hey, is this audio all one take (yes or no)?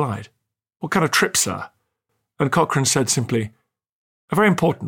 yes